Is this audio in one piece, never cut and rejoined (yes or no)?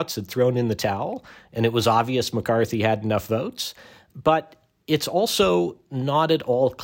yes